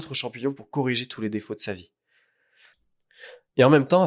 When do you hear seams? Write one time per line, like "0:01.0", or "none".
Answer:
none